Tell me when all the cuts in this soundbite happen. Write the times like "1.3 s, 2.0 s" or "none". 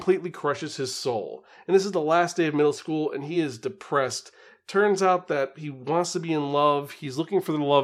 none